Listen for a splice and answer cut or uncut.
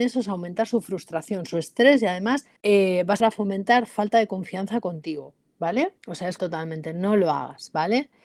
cut